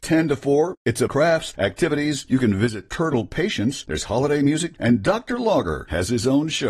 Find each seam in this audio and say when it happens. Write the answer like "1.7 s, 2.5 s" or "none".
1.1 s, 4.7 s